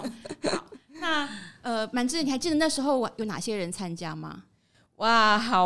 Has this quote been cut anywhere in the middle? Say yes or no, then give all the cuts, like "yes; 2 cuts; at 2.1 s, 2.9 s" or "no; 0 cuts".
no; 0 cuts